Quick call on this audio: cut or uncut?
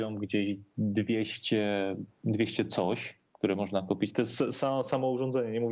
cut